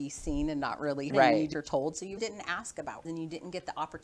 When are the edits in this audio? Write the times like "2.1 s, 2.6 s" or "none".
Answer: 1.1 s, 1.5 s, 2.2 s, 3.0 s